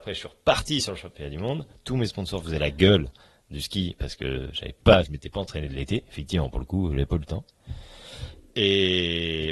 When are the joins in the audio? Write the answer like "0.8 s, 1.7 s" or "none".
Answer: none